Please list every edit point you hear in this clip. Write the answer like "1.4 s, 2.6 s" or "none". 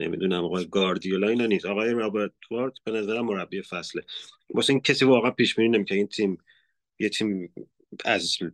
none